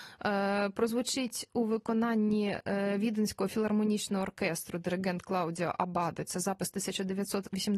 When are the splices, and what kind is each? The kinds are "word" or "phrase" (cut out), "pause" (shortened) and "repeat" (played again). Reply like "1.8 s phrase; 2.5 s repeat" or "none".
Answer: none